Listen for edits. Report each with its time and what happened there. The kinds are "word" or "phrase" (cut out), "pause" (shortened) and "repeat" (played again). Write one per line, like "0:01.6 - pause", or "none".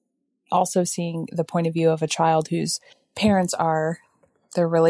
0:02.9 - pause